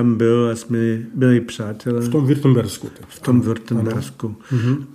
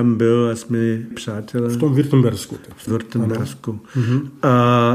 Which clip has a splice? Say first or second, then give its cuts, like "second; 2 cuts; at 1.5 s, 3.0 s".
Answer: second; 2 cuts; at 1.1 s, 2.9 s